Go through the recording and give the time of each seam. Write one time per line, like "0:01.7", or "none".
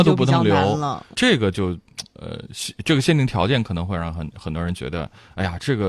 0:01.1